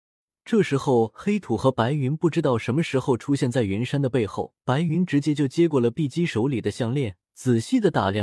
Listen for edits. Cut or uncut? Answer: cut